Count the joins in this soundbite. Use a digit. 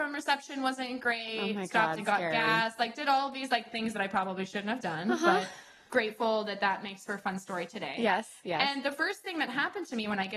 0